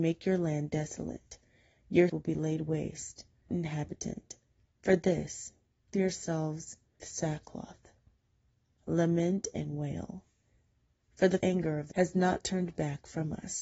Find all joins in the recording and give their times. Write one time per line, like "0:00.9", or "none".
0:02.1
0:03.5
0:05.9
0:07.0
0:11.4
0:11.9